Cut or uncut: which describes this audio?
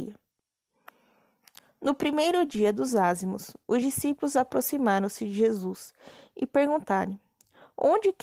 uncut